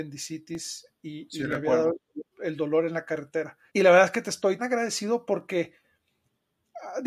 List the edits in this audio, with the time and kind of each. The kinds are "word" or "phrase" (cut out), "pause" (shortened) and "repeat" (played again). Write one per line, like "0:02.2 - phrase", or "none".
0:02.3 - pause
0:03.7 - pause
0:04.6 - word

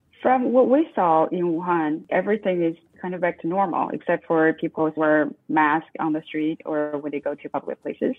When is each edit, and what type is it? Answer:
0:02.1 - word
0:05.0 - word

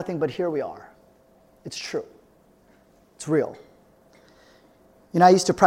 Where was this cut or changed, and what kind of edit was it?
none

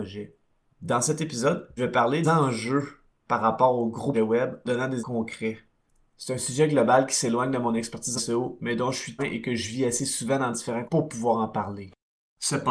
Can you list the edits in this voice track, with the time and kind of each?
0:01.8 - word
0:02.2 - word
0:04.1 - word
0:04.7 - word
0:05.0 - word
0:08.2 - word
0:09.2 - word
0:10.9 - word

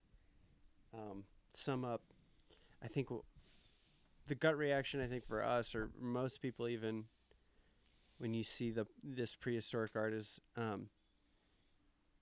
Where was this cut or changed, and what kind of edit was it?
none

